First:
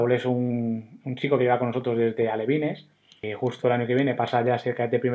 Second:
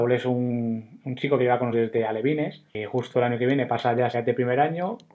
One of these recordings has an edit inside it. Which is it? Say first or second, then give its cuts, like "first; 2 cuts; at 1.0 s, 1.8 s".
second; 3 cuts; at 1.7 s, 2.7 s, 4.1 s